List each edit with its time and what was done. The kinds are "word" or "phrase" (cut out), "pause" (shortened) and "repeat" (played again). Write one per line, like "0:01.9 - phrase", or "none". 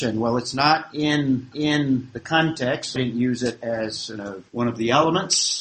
0:01.5 - repeat
0:03.0 - word
0:04.2 - word
0:04.5 - pause